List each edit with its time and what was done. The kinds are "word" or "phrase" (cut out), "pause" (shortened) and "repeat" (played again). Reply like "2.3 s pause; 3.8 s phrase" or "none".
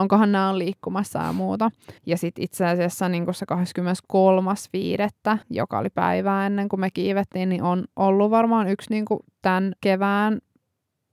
2.0 s pause; 5.4 s pause; 9.8 s pause